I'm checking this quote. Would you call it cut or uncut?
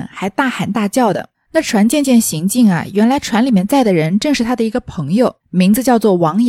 cut